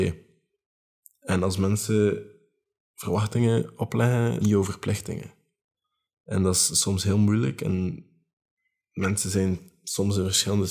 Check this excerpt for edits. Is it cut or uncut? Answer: cut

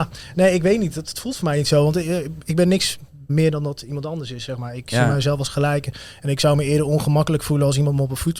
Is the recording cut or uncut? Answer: cut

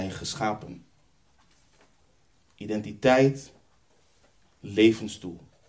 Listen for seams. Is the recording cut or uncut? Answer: uncut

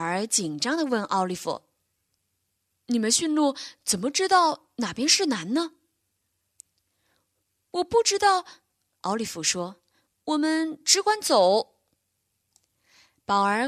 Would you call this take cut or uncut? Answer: uncut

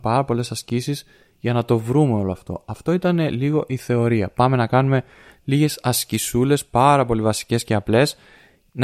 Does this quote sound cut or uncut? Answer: uncut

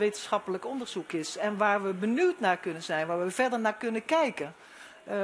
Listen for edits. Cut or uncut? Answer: uncut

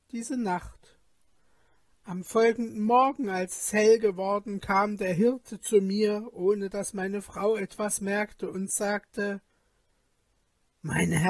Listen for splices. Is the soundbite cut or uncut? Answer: uncut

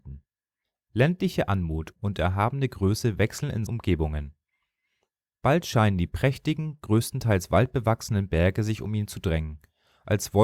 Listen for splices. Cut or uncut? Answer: cut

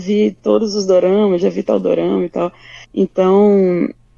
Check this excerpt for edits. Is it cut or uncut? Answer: cut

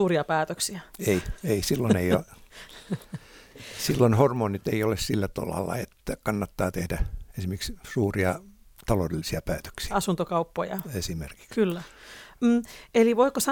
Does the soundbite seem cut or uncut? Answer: uncut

